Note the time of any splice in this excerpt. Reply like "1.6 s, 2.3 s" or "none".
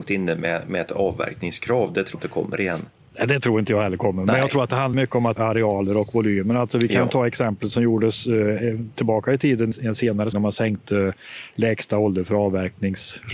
2.1 s, 4.9 s, 5.4 s, 9.7 s, 10.3 s